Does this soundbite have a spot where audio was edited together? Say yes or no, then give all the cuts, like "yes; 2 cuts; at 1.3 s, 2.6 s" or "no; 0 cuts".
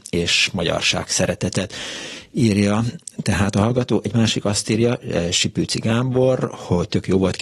no; 0 cuts